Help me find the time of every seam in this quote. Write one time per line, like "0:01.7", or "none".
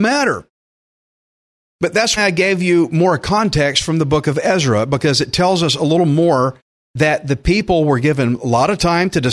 0:02.2